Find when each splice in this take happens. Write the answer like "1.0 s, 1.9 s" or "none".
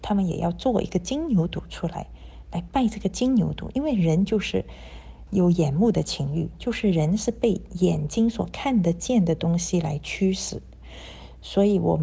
5.3 s